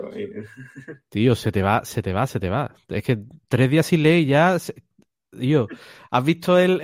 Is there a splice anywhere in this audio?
no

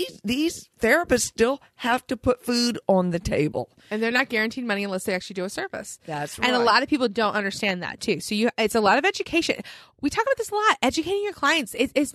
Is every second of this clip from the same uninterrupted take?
yes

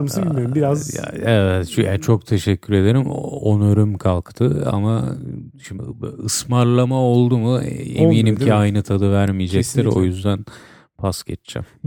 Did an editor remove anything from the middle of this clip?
no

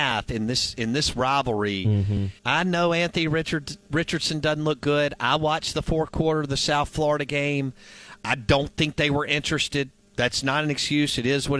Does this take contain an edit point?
yes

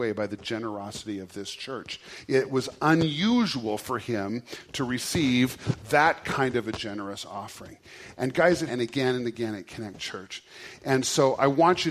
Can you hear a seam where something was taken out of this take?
yes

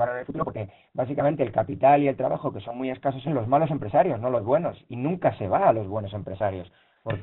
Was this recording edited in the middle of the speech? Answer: yes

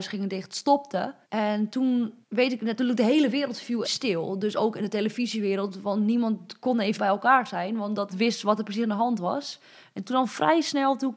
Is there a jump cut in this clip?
yes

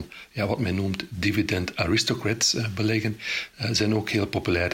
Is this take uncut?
yes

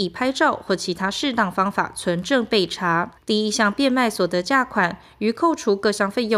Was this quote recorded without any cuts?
no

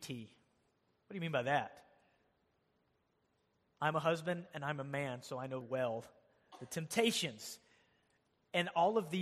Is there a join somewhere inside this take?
yes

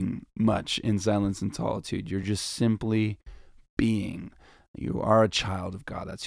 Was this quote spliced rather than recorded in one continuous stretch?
no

